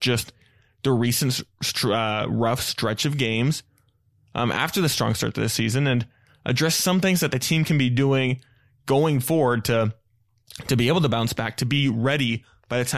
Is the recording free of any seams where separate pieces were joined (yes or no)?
yes